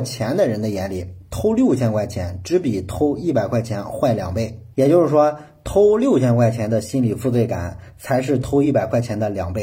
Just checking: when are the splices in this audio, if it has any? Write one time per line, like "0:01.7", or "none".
0:04.7